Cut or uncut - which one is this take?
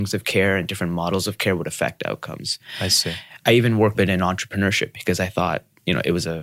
cut